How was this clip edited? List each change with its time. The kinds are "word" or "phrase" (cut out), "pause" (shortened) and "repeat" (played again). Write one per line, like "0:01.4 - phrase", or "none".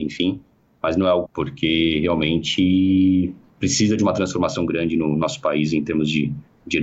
0:01.3 - phrase